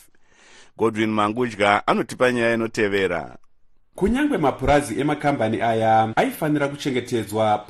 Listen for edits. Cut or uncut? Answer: uncut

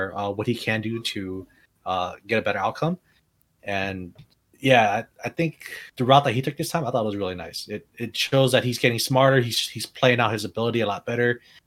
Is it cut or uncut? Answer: cut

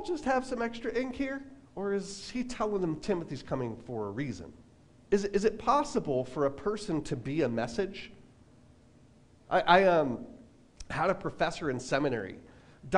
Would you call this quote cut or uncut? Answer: cut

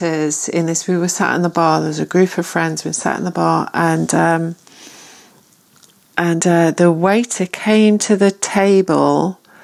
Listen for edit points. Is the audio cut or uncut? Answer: uncut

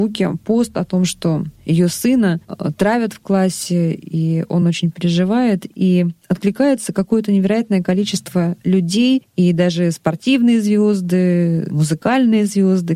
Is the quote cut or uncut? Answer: uncut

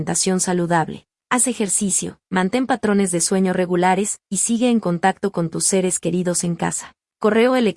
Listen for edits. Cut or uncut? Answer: cut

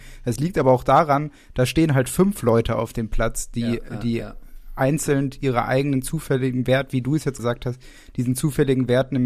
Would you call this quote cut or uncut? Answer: cut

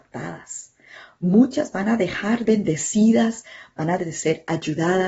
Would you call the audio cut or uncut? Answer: cut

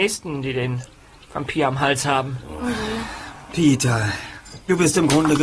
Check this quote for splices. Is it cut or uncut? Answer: uncut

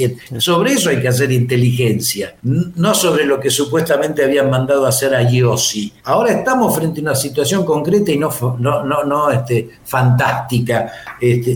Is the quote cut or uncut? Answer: cut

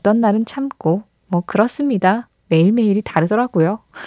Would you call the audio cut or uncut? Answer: uncut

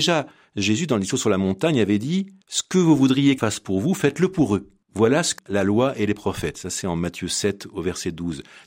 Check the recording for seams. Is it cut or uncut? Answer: cut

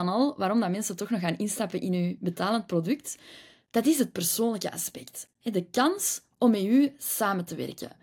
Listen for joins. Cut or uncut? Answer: uncut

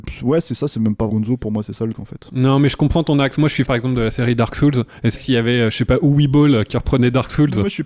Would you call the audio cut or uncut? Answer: cut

